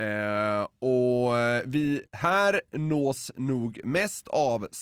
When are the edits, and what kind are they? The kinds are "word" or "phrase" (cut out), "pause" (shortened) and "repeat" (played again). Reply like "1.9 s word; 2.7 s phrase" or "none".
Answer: 2.1 s pause